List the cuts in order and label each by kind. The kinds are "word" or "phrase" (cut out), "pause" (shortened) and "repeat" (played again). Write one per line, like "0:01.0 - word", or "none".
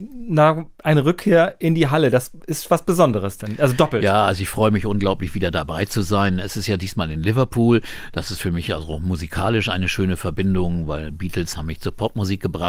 none